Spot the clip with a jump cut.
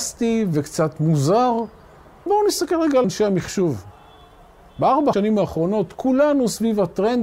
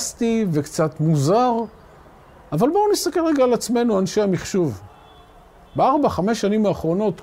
first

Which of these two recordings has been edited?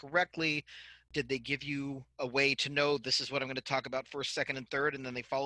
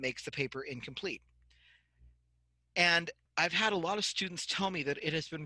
first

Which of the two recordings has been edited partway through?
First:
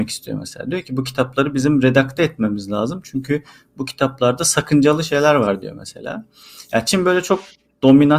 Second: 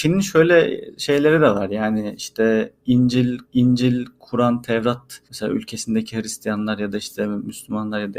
second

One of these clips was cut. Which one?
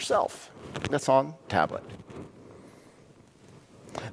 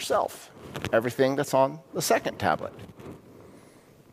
first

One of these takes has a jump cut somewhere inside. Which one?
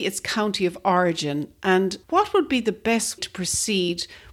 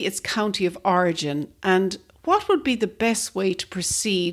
first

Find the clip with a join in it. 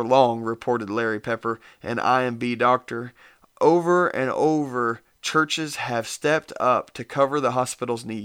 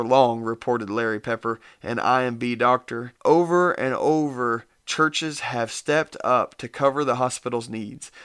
second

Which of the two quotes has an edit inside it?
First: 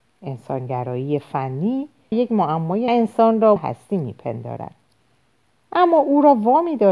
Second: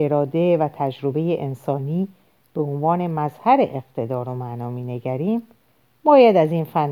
first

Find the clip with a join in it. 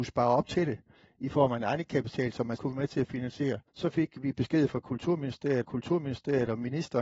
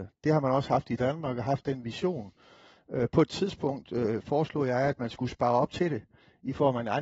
first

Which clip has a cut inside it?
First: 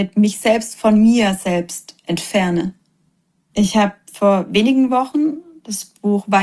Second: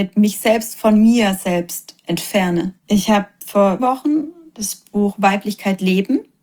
second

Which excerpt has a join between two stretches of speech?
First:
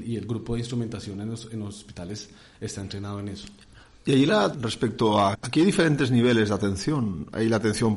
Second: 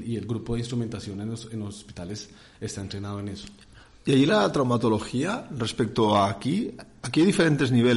first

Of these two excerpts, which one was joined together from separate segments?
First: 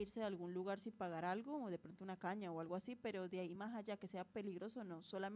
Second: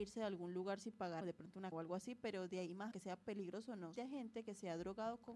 second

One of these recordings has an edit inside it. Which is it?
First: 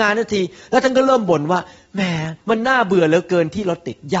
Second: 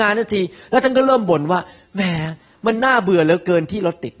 first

